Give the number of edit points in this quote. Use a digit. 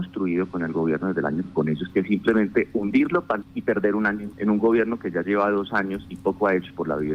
4